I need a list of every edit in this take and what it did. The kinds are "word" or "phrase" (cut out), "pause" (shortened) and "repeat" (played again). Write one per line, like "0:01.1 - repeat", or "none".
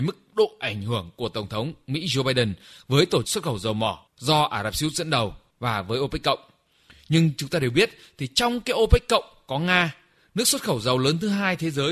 0:03.2 - word